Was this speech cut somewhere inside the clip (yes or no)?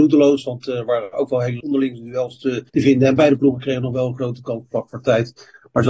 yes